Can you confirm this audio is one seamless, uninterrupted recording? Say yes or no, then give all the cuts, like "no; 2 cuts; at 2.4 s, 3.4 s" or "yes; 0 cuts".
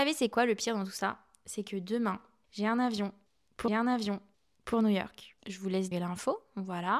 no; 3 cuts; at 3.7 s, 5.4 s, 5.9 s